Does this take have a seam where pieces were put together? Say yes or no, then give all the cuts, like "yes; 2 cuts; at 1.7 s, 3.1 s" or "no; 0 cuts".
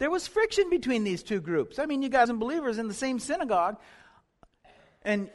yes; 1 cut; at 2.2 s